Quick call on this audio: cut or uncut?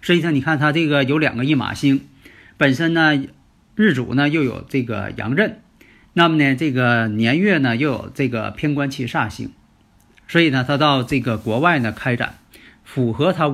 uncut